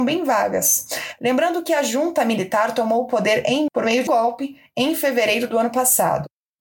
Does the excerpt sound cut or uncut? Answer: cut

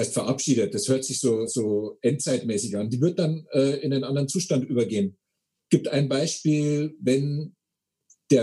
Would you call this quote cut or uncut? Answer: uncut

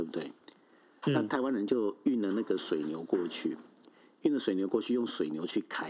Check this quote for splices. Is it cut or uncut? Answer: uncut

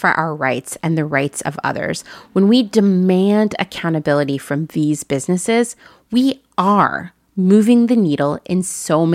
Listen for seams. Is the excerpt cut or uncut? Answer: uncut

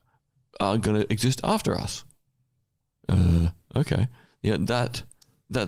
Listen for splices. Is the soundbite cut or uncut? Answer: uncut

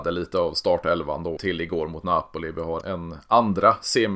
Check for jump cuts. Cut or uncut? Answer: cut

